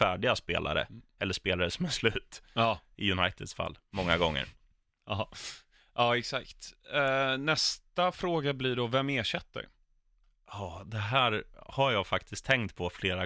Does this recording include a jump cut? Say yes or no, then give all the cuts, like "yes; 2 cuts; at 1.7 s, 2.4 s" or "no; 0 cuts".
no; 0 cuts